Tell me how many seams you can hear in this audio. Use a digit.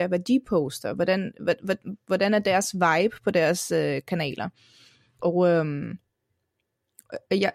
0